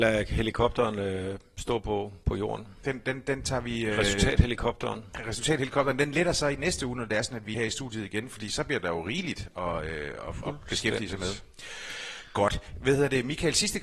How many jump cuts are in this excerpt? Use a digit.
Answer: 1